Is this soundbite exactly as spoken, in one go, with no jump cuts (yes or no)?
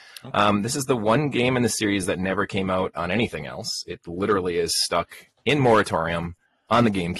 yes